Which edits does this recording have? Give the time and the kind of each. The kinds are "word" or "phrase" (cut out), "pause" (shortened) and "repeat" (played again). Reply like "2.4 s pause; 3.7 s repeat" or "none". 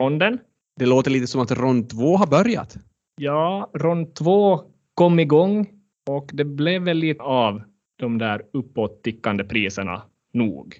7.2 s word